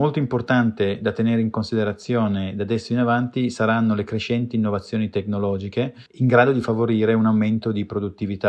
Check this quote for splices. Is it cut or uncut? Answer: cut